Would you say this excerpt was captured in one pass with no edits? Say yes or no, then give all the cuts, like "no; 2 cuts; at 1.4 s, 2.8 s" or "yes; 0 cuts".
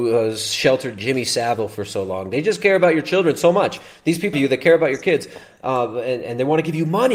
no; 1 cut; at 4.3 s